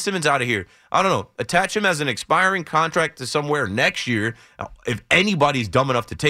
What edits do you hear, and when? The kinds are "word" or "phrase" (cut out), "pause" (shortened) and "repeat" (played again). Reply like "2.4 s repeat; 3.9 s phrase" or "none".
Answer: none